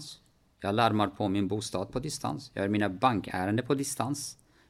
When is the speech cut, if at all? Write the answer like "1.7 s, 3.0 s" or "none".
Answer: none